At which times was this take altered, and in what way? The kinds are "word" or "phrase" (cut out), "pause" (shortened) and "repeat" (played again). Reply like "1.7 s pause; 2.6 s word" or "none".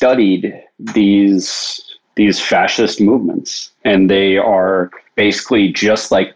2.0 s pause; 3.8 s pause; 5.0 s pause